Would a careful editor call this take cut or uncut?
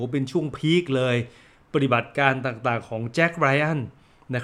uncut